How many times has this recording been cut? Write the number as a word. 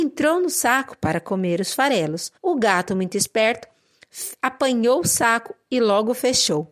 one